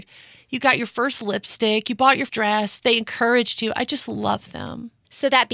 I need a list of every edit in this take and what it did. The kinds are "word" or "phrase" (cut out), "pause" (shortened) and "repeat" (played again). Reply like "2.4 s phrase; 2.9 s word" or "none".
2.3 s word